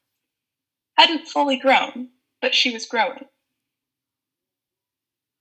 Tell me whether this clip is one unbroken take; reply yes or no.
yes